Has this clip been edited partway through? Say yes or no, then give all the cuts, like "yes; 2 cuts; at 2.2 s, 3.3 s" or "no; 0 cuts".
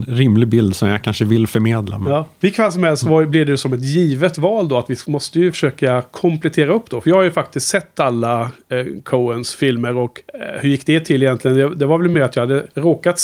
no; 0 cuts